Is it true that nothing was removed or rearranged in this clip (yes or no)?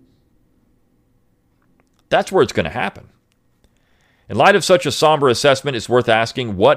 yes